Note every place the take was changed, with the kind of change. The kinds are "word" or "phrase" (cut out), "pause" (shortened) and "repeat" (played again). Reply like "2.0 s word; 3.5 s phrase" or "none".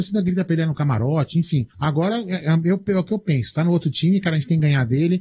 1.7 s pause

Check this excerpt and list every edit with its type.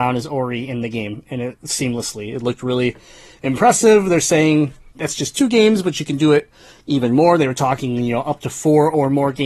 4.9 s pause

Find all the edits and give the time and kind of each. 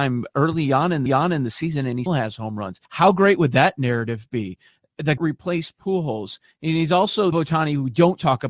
1.1 s repeat; 2.1 s word; 2.8 s pause; 5.2 s phrase; 7.3 s phrase

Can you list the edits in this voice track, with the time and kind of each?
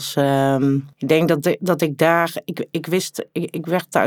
0.9 s pause

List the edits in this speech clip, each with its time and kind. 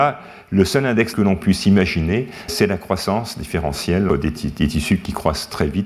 1.1 s word; 2.5 s word; 4.1 s word

